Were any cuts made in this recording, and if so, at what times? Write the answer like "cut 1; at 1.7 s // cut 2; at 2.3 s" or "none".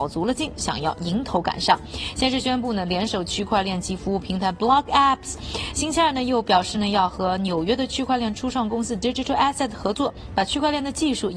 none